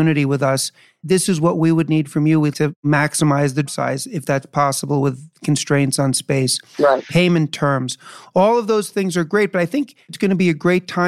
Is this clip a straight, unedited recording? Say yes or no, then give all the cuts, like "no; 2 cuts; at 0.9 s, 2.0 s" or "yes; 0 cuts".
no; 3 cuts; at 1.0 s, 2.5 s, 3.7 s